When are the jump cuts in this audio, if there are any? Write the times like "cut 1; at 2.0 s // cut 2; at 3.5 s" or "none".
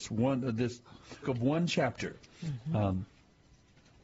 cut 1; at 1.2 s